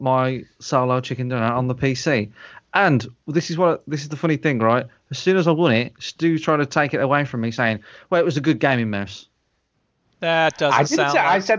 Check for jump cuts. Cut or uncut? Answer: uncut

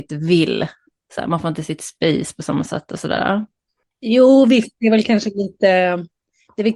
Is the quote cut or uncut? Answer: uncut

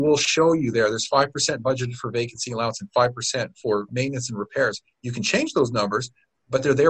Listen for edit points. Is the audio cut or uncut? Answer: cut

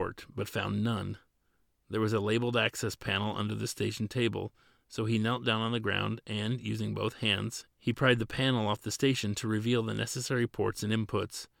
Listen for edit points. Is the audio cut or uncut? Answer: uncut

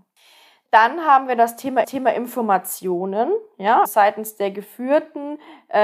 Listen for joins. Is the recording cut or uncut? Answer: cut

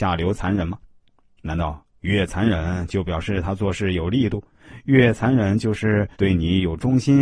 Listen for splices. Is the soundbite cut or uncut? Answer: cut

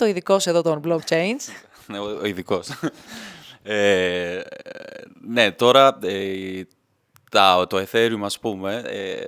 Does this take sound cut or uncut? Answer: uncut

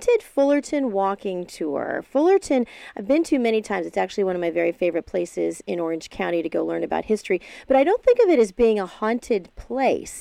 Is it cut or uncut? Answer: uncut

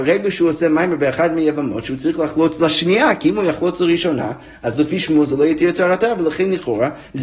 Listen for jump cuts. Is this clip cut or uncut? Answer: uncut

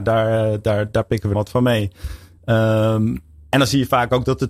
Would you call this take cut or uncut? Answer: cut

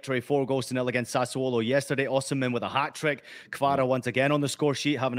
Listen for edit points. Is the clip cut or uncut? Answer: uncut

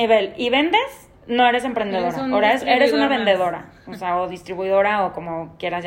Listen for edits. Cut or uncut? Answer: uncut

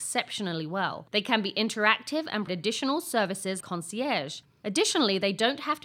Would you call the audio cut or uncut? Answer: cut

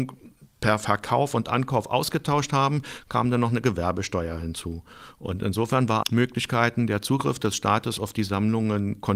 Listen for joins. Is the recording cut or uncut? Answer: cut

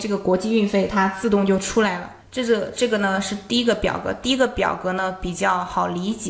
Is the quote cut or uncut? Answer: cut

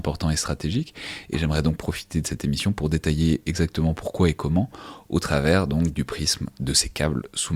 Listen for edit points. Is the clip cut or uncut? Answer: uncut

